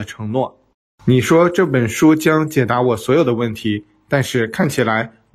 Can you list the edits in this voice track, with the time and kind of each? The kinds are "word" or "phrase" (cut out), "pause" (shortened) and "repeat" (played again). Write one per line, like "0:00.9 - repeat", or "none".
none